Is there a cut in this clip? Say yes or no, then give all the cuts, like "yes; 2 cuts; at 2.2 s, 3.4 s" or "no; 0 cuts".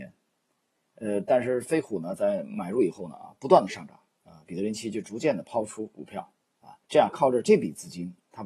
yes; 2 cuts; at 4.1 s, 6.8 s